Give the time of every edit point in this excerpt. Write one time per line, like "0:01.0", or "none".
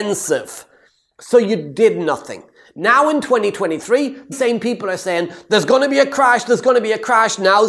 0:04.3